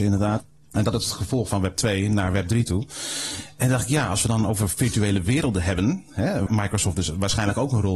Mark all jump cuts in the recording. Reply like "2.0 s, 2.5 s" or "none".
0.9 s, 1.5 s, 6.5 s